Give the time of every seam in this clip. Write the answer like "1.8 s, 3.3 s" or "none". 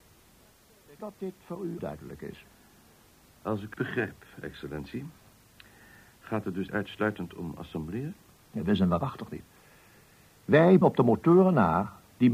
1.0 s, 1.8 s, 3.7 s, 6.7 s, 10.8 s